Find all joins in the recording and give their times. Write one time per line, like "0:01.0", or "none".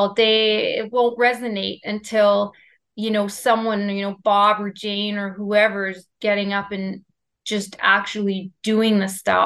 none

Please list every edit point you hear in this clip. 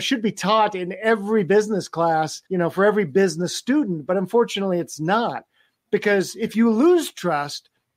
0:02.5

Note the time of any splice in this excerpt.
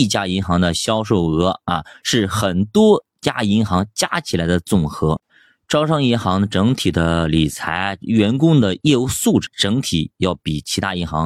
0:09.5

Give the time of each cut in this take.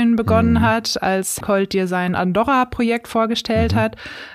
0:01.4

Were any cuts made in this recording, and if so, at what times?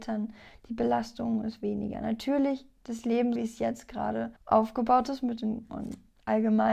0:03.4
0:04.4
0:05.7

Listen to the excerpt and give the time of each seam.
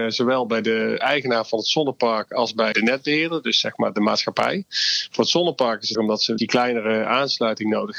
0:01.0
0:02.7
0:05.9
0:06.4

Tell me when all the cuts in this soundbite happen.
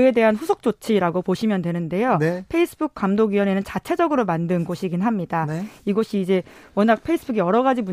none

